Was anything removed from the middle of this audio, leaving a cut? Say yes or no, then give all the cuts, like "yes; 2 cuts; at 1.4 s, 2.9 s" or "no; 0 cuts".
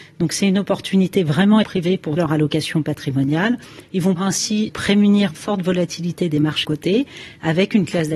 yes; 6 cuts; at 1.6 s, 2.2 s, 4.2 s, 4.7 s, 5.4 s, 6.6 s